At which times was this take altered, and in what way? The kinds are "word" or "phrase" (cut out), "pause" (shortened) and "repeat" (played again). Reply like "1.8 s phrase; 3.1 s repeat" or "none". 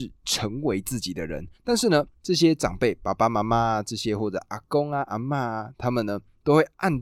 1.5 s pause; 2.1 s pause